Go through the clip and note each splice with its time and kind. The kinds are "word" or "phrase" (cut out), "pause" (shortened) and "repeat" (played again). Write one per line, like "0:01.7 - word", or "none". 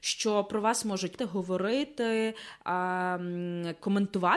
0:01.2 - word